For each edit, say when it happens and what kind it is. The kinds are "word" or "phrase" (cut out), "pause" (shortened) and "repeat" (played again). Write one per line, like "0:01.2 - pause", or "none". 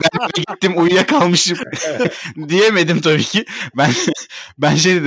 none